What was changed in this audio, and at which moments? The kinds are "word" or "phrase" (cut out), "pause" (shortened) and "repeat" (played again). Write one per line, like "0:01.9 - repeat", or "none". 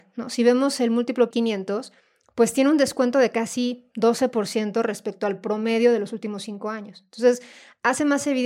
0:01.3 - phrase

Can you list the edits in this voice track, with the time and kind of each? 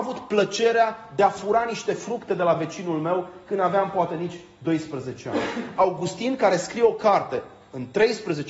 none

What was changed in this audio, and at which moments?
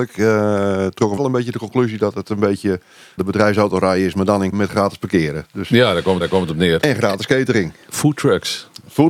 0:01.2 - word
0:03.2 - word
0:04.5 - word
0:06.2 - repeat

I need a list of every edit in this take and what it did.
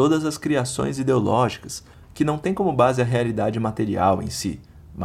none

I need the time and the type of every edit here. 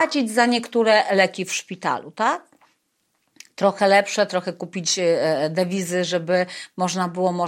none

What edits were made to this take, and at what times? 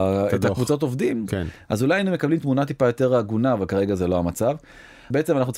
none

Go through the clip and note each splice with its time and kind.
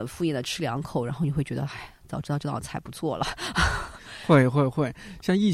none

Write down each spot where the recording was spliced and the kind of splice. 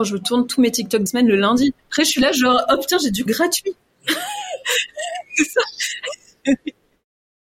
0:01.1 - word
0:01.8 - pause
0:03.3 - word

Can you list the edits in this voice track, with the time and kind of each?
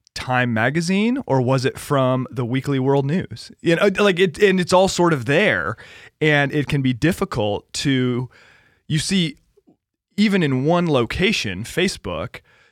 none

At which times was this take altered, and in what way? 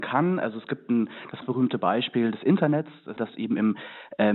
0:01.4 - word
0:03.2 - word

